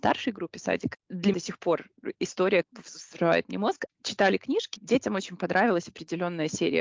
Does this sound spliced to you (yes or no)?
yes